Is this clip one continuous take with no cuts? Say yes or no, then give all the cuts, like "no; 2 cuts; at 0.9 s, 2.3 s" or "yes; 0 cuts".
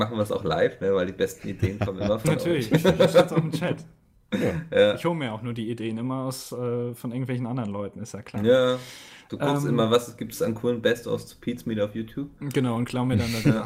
yes; 0 cuts